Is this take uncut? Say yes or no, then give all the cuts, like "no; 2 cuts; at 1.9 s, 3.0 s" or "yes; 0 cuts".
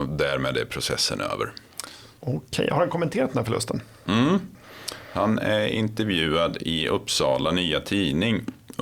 yes; 0 cuts